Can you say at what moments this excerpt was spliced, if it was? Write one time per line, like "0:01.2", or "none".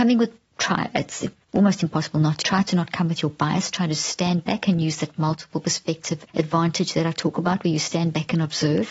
0:02.4
0:06.3